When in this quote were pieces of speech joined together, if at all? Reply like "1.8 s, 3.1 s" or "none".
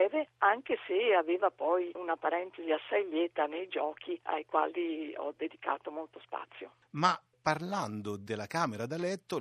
none

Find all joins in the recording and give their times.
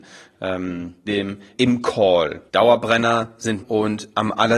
1.1 s, 1.5 s, 2.5 s, 3.6 s

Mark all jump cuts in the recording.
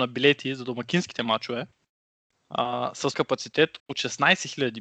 3.1 s, 3.8 s

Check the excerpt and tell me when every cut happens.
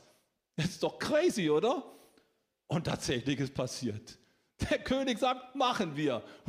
none

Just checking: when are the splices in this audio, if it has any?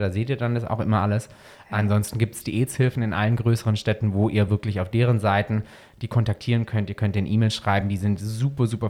none

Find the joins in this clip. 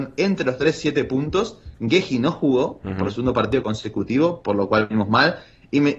none

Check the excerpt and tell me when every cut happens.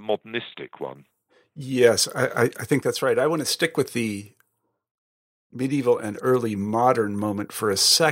none

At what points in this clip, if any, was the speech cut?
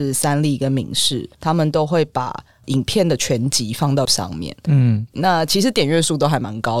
1.3 s, 4.0 s

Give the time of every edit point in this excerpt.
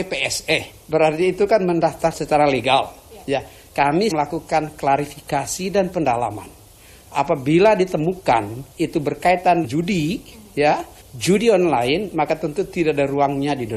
2.1 s, 4.1 s, 8.7 s, 9.6 s, 11.0 s

